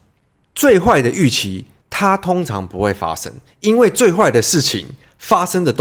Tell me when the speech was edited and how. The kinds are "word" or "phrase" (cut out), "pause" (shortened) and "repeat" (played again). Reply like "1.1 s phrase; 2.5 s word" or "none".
1.8 s pause